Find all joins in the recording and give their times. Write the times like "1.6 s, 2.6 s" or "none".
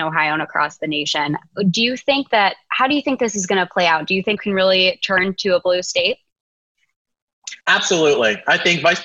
4.4 s, 7.6 s